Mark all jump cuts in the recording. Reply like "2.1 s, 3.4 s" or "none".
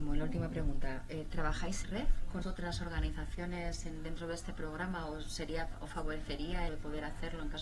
1.8 s, 2.4 s, 6.7 s